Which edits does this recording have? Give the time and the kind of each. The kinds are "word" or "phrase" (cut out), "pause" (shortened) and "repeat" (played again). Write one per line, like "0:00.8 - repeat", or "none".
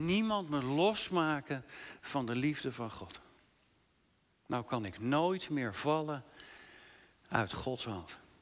none

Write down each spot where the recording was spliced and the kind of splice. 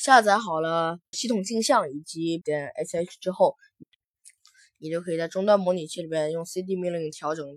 0:01.1 - word
0:02.4 - word

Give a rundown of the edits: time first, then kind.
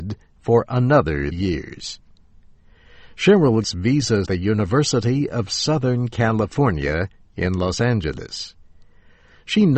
0:01.3 - word
0:03.6 - phrase
0:04.3 - phrase

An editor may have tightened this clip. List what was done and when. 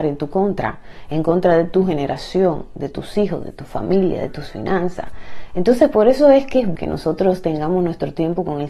0:06.7 - word

